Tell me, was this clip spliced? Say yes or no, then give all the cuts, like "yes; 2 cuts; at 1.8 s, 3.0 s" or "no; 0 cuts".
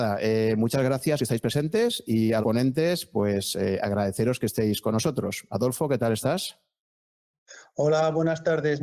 yes; 2 cuts; at 1.2 s, 2.4 s